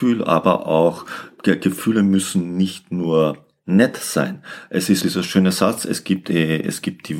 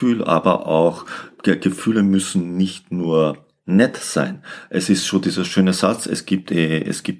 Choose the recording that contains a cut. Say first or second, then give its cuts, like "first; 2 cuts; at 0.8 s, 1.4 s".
first; 1 cut; at 5.0 s